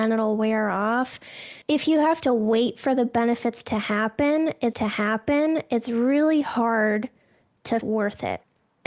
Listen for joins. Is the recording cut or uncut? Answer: cut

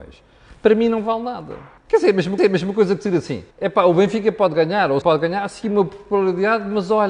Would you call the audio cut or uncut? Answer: cut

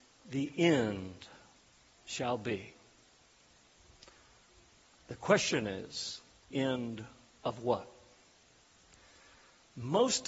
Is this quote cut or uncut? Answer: cut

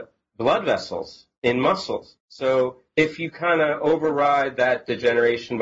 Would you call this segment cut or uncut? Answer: cut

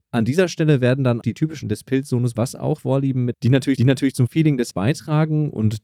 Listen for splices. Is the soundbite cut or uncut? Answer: cut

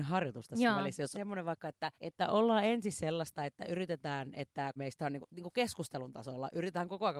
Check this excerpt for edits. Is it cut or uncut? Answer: cut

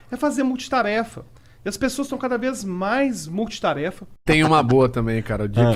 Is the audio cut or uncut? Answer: uncut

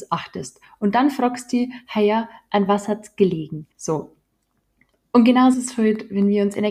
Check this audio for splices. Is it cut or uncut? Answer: cut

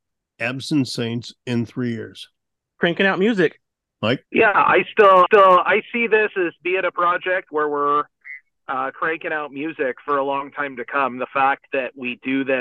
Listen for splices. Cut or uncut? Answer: cut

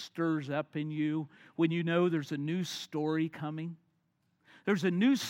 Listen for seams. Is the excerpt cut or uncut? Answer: uncut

